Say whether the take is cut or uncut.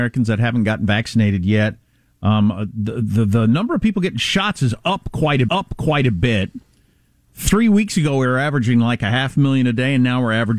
cut